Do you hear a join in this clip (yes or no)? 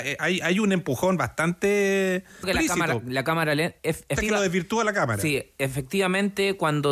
yes